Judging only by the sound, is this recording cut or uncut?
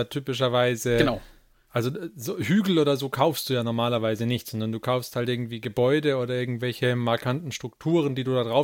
uncut